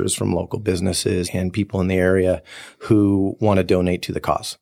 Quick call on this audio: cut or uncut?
cut